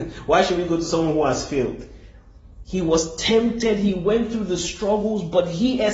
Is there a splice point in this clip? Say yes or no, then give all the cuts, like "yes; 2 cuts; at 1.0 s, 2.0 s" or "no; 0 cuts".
no; 0 cuts